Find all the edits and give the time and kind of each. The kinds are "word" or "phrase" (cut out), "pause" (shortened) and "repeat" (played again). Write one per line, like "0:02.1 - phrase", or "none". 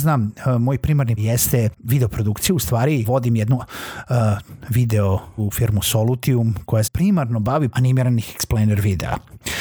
0:01.2 - word
0:01.7 - word
0:03.0 - word
0:03.6 - word
0:05.4 - word
0:06.8 - word
0:07.7 - word